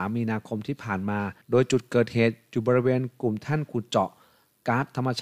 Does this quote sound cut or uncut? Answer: cut